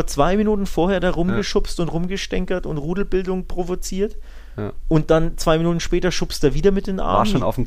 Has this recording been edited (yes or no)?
no